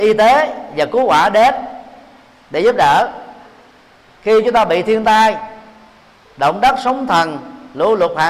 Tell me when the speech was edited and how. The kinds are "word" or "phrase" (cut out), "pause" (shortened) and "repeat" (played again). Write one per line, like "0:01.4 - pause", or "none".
none